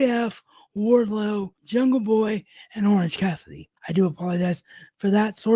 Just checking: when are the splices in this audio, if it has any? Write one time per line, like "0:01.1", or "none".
0:01.6
0:03.8